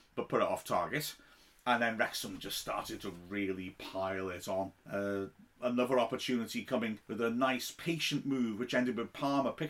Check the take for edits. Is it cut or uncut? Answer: cut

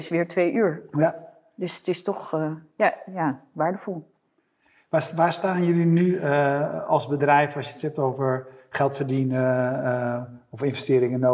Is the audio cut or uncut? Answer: uncut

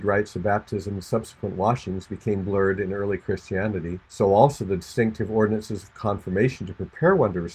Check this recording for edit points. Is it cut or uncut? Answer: cut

